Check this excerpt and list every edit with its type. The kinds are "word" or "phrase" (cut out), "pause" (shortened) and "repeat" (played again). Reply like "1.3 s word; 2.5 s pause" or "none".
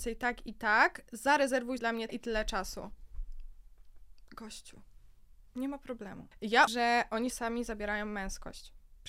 1.8 s word; 2.1 s word; 6.7 s word; 7.3 s word